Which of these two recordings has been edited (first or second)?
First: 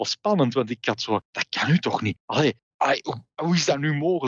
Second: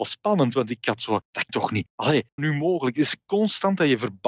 second